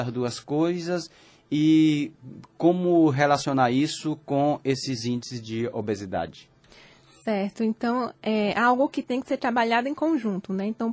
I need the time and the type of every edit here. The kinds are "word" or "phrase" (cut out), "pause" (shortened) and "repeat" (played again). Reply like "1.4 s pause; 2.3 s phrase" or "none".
none

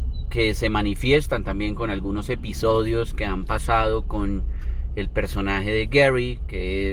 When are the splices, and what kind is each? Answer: none

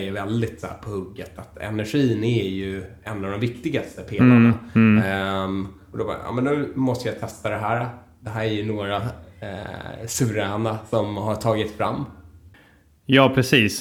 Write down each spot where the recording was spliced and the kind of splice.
none

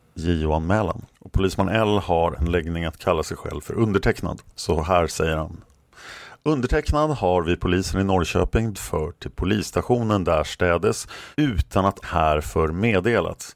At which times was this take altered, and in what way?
1.1 s pause; 2.3 s word; 4.5 s pause; 8.7 s word; 11.3 s pause; 12.0 s word

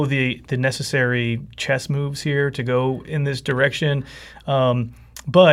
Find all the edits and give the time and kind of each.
none

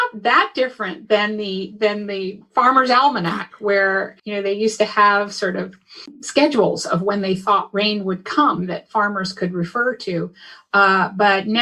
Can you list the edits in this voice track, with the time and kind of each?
4.2 s pause

